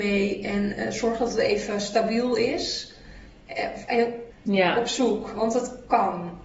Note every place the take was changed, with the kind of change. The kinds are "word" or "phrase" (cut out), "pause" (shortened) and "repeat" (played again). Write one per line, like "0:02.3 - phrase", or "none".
0:04.3 - phrase